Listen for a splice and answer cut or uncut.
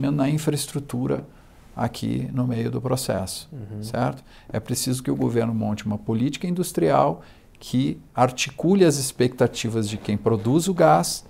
uncut